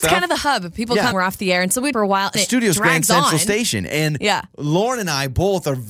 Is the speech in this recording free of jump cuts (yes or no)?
no